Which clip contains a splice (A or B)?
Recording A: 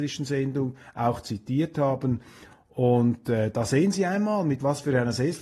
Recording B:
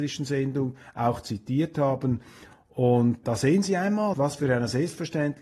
B